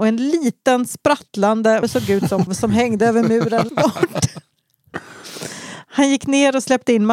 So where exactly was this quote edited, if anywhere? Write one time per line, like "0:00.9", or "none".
0:01.8
0:02.5
0:03.7